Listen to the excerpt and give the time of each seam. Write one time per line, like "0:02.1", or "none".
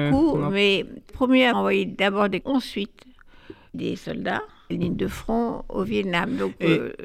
0:01.1
0:01.5
0:02.4
0:03.7
0:04.7